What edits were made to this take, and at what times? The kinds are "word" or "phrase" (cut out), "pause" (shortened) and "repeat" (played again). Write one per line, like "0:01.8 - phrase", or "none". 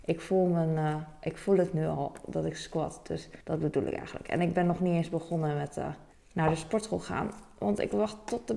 0:03.4 - pause
0:06.1 - pause